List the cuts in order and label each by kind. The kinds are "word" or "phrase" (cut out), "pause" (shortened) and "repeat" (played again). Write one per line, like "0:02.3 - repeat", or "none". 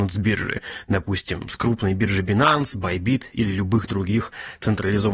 none